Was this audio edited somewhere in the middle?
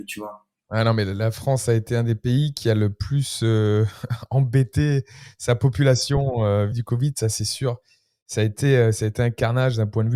yes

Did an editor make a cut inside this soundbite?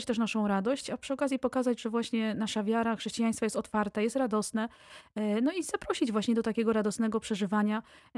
no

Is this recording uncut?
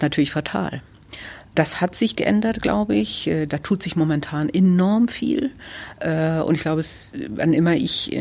yes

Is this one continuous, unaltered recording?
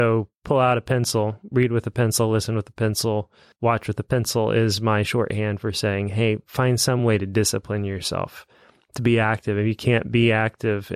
yes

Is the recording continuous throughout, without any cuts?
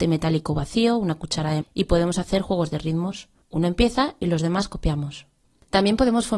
no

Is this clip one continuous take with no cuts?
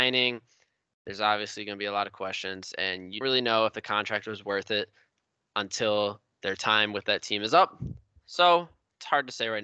no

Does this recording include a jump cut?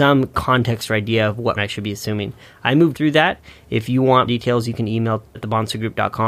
yes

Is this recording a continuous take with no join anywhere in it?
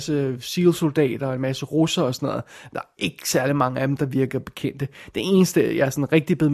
yes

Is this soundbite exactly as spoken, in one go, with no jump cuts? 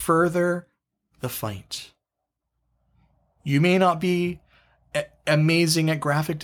yes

